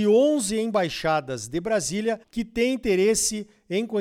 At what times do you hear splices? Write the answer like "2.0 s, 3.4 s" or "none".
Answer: 2.2 s